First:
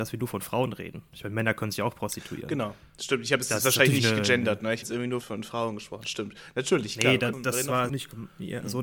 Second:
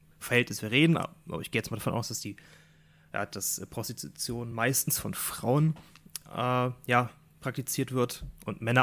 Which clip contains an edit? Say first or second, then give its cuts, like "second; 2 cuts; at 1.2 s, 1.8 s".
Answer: first; 4 cuts; at 4.8 s, 5.2 s, 7.3 s, 7.9 s